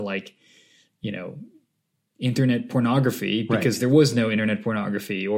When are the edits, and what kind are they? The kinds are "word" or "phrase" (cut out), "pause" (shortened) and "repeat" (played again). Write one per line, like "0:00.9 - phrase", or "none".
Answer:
none